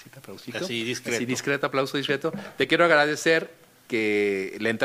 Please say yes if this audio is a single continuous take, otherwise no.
yes